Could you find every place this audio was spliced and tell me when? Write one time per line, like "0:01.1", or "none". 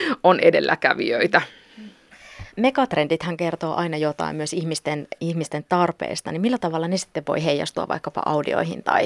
0:02.5